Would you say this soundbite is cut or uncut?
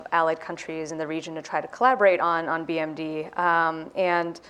uncut